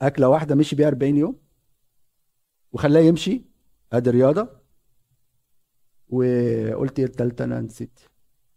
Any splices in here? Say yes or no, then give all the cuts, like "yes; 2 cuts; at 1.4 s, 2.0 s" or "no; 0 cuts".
no; 0 cuts